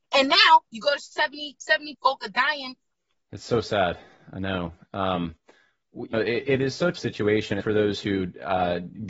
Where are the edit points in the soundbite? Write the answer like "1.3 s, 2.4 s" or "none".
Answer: 1.0 s, 1.9 s, 3.1 s, 6.1 s, 6.4 s, 7.0 s, 7.6 s